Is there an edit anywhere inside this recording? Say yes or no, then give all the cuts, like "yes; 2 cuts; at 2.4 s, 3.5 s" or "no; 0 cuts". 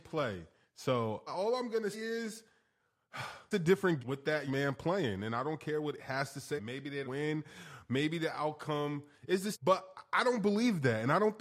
yes; 9 cuts; at 1.3 s, 1.9 s, 3.5 s, 4.0 s, 4.5 s, 6.0 s, 6.6 s, 7.0 s, 9.5 s